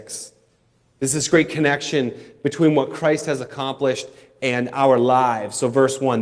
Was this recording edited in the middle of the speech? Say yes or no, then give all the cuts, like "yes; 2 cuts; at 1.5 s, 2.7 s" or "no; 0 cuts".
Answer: no; 0 cuts